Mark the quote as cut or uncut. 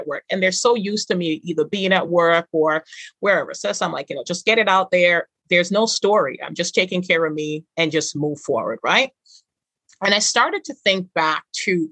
uncut